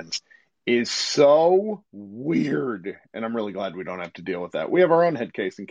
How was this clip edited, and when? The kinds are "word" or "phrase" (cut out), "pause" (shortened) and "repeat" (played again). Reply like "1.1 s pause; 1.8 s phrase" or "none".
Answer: 1.9 s pause